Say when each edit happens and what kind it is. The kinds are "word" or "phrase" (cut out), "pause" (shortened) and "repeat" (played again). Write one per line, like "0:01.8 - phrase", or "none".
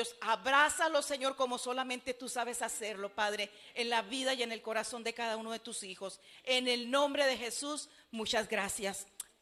none